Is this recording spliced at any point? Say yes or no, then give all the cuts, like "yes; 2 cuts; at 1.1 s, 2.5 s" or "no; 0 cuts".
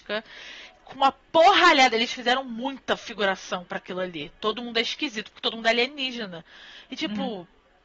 no; 0 cuts